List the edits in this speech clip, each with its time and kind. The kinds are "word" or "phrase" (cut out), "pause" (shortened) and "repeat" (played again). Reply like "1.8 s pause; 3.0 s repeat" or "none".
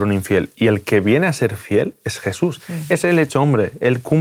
none